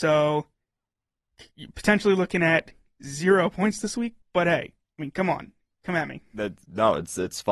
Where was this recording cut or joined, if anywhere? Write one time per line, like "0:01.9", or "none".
0:04.2